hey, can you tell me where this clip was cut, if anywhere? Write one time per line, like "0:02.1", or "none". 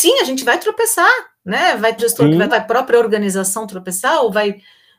0:02.0
0:02.5